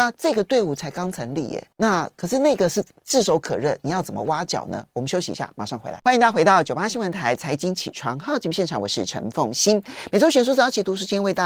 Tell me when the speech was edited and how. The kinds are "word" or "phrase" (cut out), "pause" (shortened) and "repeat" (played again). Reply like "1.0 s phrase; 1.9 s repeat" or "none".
1.7 s pause

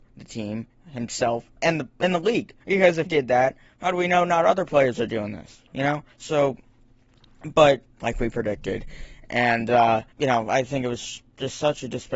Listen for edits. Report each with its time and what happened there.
1.6 s pause; 2.6 s pause; 3.1 s word; 6.1 s pause; 7.9 s phrase; 10.1 s pause

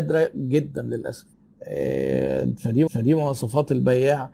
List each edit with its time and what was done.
1.3 s pause; 2.9 s repeat

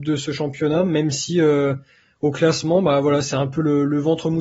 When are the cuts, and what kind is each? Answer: none

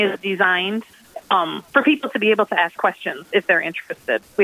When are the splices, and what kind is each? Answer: 1.7 s pause

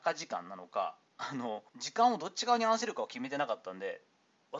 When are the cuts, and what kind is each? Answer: 1.7 s pause

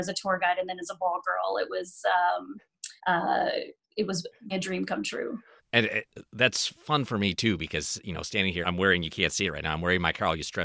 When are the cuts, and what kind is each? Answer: 3.0 s pause; 4.5 s word; 5.6 s pause; 8.6 s word

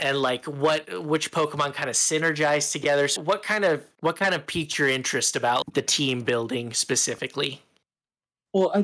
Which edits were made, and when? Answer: 3.2 s word; 3.9 s pause; 5.6 s word

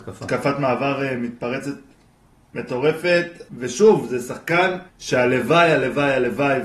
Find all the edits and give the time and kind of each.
3.5 s pause; 4.9 s pause

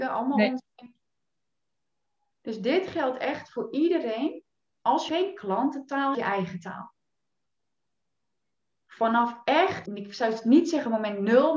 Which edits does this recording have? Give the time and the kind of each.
5.1 s phrase; 6.1 s phrase; 9.9 s word

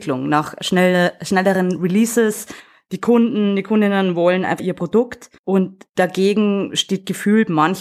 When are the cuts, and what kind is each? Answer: 4.6 s word; 5.4 s pause

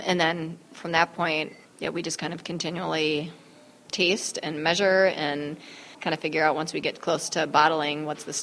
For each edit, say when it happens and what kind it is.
1.6 s word; 3.9 s word; 5.9 s pause

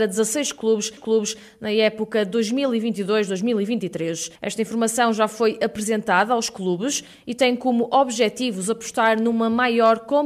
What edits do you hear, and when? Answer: 1.0 s repeat; 4.4 s pause

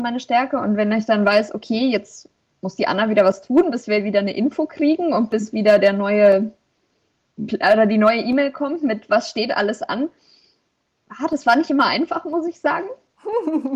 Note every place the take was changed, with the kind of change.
none

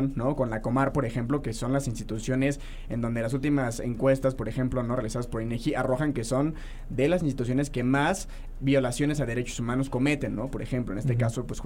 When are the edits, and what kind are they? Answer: 8.5 s word

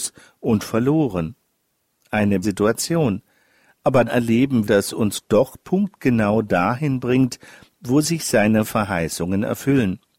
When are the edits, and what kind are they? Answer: 2.4 s word; 4.1 s word; 4.6 s word; 5.2 s word

